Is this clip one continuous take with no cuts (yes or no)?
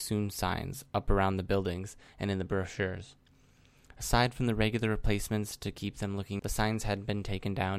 no